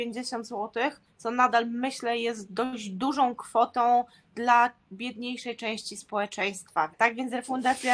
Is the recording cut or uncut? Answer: uncut